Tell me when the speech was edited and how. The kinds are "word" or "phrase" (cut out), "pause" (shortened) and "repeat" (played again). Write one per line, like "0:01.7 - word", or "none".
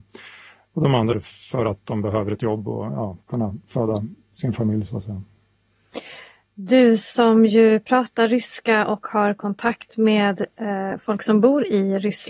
0:01.1 - word
0:03.2 - pause